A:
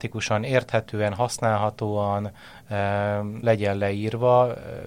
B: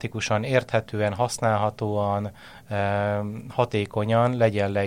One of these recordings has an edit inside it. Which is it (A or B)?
A